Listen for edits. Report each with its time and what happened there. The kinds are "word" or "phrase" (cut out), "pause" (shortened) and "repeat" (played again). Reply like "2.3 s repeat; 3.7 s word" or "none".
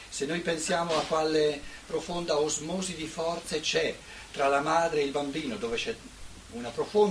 none